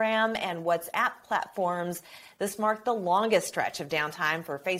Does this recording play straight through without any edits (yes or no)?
yes